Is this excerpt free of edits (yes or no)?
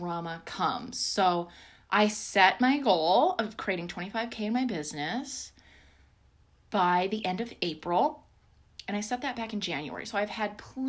yes